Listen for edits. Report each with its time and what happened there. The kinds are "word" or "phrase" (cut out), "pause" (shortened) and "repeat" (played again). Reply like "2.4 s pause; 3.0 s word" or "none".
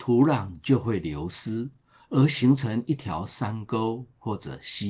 none